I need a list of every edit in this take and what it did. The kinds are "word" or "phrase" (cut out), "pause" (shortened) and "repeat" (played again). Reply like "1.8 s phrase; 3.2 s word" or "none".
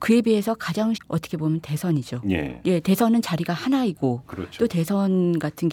0.9 s phrase